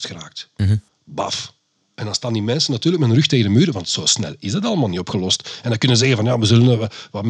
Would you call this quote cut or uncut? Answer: uncut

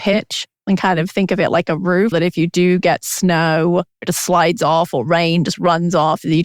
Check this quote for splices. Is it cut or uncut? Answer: cut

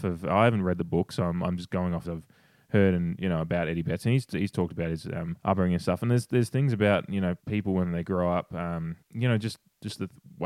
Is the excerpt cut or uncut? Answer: cut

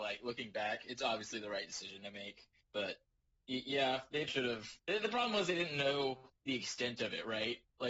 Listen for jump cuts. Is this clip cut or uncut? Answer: cut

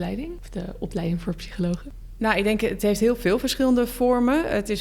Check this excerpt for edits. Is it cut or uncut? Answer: uncut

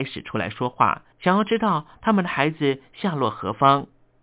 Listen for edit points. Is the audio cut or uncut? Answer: cut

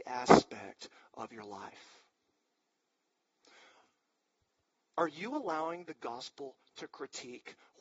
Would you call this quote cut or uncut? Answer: uncut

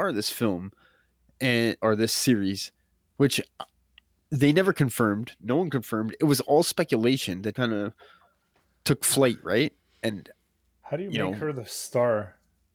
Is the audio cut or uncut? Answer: cut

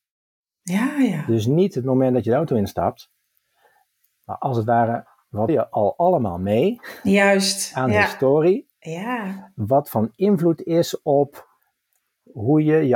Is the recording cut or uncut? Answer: cut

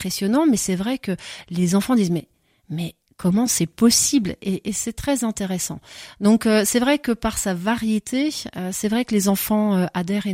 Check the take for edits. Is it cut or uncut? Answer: uncut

